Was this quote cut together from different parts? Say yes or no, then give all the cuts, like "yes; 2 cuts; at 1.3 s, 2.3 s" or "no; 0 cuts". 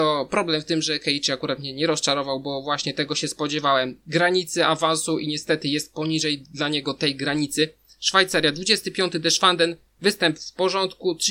no; 0 cuts